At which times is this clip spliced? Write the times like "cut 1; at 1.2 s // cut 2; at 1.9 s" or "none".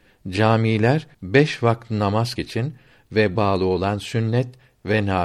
cut 1; at 1.1 s // cut 2; at 2.4 s // cut 3; at 3.4 s